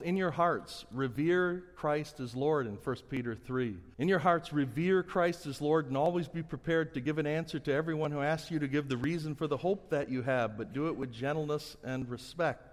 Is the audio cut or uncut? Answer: cut